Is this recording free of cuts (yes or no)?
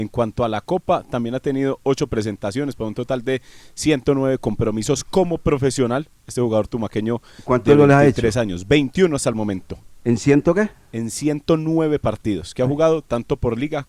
yes